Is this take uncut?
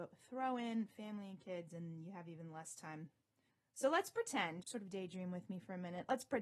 no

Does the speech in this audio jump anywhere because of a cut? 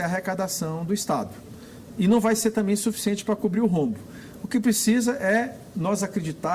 no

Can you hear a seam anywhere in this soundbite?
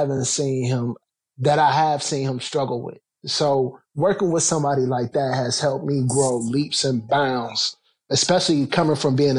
no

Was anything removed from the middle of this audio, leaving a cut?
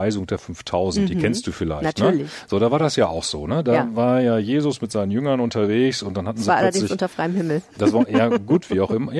no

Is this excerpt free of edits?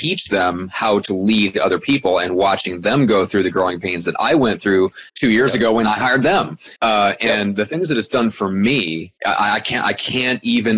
no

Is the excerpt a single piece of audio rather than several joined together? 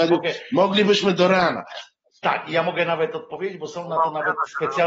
yes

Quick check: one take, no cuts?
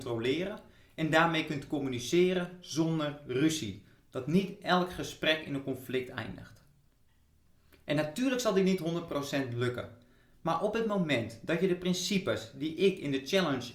yes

